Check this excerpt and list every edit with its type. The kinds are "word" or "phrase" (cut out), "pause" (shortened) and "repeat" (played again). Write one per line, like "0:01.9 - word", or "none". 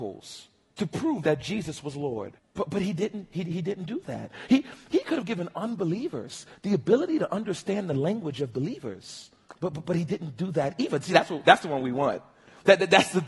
0:02.4 - pause
0:09.5 - pause